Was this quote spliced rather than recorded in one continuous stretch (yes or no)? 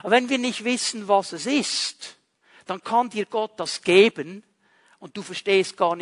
no